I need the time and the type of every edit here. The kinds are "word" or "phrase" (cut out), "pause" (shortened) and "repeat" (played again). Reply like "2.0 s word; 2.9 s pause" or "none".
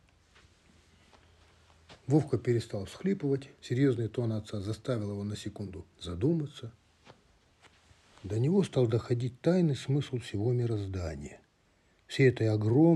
2.0 s pause; 3.5 s pause; 5.9 s pause

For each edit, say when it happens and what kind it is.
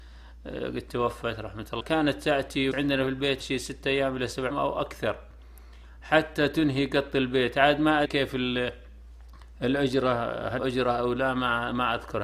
1.8 s word; 2.7 s word; 3.4 s word; 4.5 s word; 8.0 s word; 10.6 s word

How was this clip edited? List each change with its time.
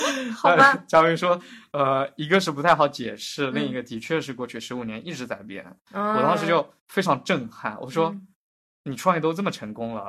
6.8 s pause

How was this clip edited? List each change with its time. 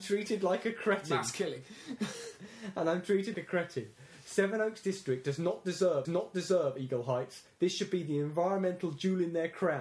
3.3 s word; 6.0 s repeat

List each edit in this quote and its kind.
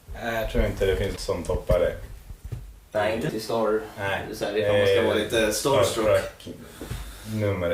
1.2 s word; 3.3 s phrase

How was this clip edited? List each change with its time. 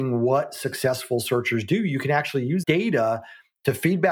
2.6 s word

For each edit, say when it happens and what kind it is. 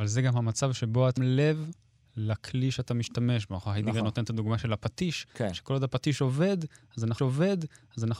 1.2 s word; 5.3 s pause; 7.2 s repeat

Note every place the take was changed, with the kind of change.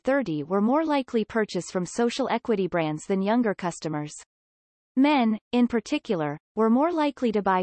none

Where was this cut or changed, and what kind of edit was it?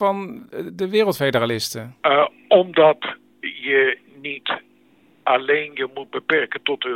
none

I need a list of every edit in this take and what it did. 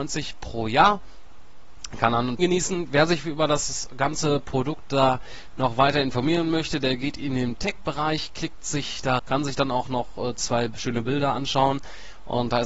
2.4 s phrase; 9.2 s word

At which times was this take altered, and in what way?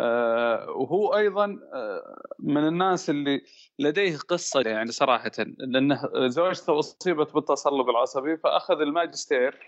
4.6 s word

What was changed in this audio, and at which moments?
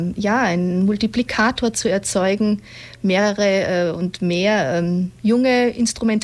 5.2 s pause

